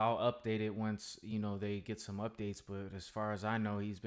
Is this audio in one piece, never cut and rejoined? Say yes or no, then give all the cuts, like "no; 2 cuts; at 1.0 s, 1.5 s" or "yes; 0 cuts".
yes; 0 cuts